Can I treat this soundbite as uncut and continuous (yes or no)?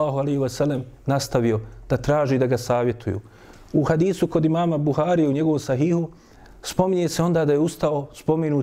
yes